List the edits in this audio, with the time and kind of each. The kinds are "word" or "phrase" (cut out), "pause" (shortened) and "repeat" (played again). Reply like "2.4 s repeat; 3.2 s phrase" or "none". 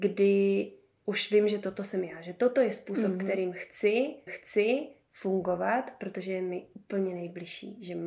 4.3 s repeat